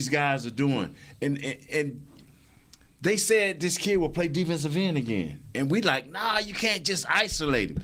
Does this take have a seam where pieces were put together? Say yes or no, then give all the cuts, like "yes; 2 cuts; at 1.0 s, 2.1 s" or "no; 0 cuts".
no; 0 cuts